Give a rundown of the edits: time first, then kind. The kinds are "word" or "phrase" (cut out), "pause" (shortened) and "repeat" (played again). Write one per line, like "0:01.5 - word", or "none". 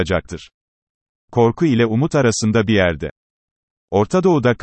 none